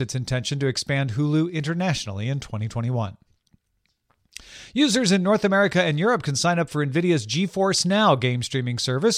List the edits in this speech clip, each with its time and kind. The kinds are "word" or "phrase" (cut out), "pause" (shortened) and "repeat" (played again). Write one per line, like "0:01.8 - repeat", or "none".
none